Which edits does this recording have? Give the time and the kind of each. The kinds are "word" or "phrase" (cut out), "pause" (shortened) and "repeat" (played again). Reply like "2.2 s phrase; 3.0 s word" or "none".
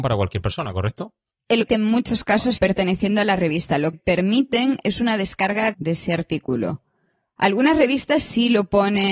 1.7 s word; 2.6 s word; 3.9 s word; 5.7 s word